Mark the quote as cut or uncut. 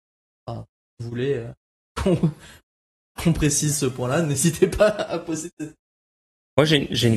uncut